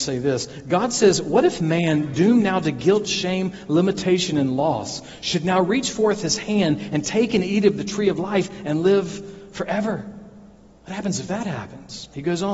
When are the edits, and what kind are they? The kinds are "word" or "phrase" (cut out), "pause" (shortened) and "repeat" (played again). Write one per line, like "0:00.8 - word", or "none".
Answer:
none